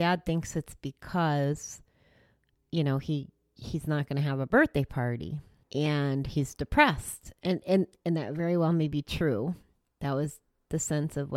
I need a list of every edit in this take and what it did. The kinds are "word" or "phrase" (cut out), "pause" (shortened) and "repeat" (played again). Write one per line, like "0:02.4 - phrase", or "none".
0:05.6 - pause